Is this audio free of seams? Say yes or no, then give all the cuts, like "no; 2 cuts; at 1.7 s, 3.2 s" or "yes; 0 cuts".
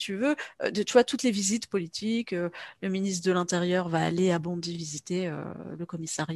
yes; 0 cuts